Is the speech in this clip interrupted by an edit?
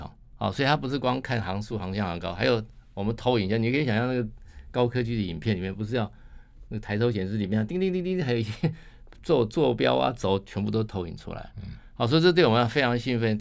no; 0 cuts

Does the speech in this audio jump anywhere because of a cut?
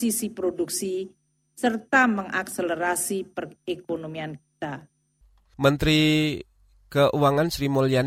no; 0 cuts

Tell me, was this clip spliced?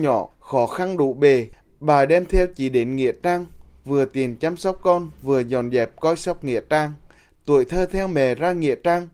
no; 0 cuts

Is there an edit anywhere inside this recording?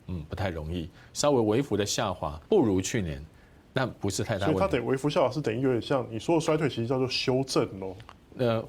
yes; 1 cut; at 2.5 s

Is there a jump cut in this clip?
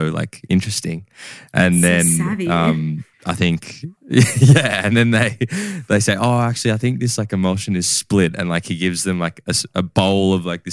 yes; 2 cuts; at 3.1 s, 4.0 s

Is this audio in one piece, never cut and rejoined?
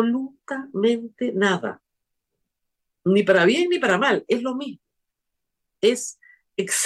yes; 0 cuts

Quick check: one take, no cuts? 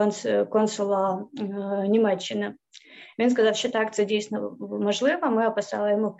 yes; 0 cuts

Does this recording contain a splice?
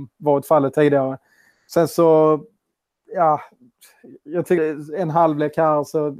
yes; 1 cut; at 4.6 s

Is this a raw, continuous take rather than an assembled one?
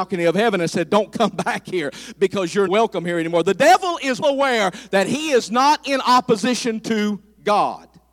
no; 2 cuts; at 2.7 s, 4.2 s

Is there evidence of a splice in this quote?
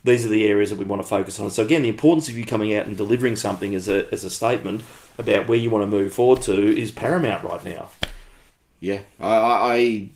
no; 0 cuts

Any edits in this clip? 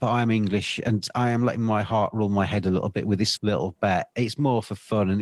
yes; 1 cut; at 3.4 s

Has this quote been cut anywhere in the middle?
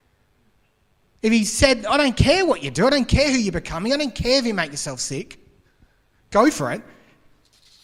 no; 0 cuts

